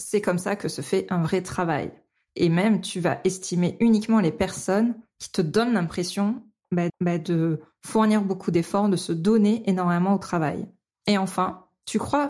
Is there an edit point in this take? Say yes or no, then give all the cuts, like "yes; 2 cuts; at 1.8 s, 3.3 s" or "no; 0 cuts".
yes; 1 cut; at 6.9 s